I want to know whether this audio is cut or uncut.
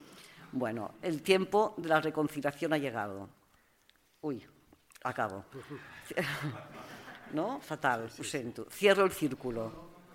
uncut